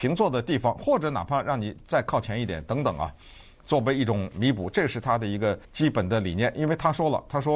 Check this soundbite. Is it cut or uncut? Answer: cut